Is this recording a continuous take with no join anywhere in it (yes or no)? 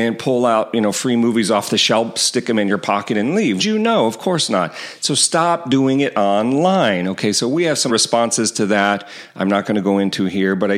no